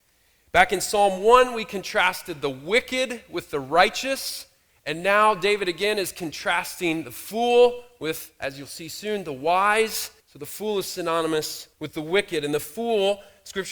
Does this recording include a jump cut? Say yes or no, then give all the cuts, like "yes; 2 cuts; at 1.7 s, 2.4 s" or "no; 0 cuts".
yes; 2 cuts; at 10.2 s, 11.7 s